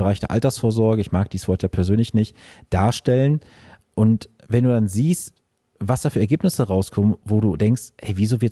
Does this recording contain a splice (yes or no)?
no